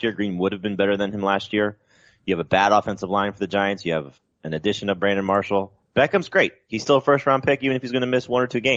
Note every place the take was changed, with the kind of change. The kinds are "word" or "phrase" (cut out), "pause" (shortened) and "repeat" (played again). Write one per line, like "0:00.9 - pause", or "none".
0:05.8 - pause